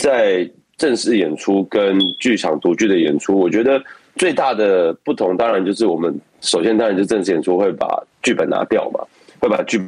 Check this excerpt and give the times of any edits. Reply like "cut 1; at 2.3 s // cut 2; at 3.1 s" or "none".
cut 1; at 8.1 s